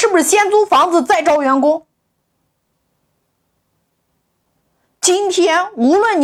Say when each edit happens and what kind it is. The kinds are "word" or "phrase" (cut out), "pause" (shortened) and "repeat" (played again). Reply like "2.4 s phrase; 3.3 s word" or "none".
none